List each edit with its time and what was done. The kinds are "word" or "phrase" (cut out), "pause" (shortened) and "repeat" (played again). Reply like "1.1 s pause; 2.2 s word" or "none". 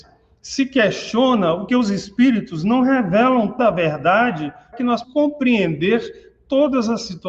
1.7 s word; 3.6 s word; 4.7 s word; 5.0 s word